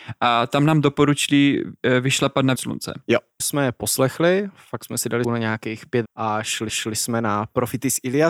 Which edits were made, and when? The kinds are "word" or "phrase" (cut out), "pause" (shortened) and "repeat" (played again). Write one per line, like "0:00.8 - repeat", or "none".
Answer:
0:02.6 - word
0:03.4 - word
0:05.2 - word
0:06.0 - word
0:06.7 - repeat

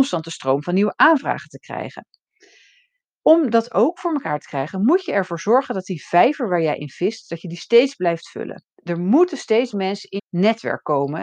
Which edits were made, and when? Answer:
0:08.7 - pause
0:09.7 - word
0:10.2 - word

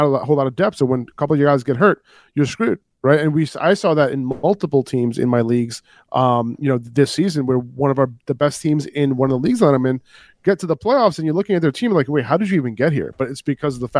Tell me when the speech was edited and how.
none

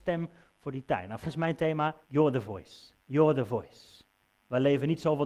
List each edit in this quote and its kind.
0:01.2 - word
0:02.0 - pause
0:03.0 - pause

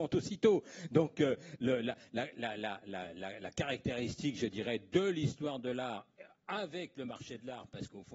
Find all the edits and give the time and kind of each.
none

